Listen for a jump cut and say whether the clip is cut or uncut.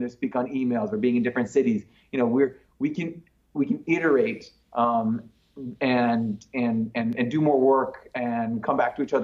uncut